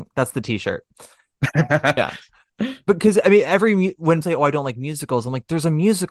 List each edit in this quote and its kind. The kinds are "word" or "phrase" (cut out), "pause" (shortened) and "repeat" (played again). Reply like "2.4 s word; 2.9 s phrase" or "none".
4.2 s word